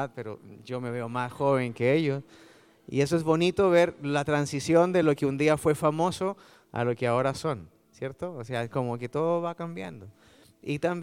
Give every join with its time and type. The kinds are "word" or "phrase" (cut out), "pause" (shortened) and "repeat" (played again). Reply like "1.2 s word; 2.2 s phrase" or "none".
none